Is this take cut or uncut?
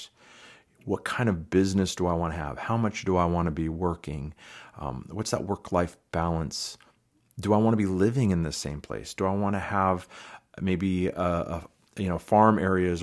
uncut